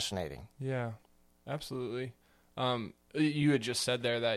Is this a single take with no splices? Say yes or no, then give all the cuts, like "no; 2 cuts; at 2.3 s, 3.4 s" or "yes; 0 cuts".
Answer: yes; 0 cuts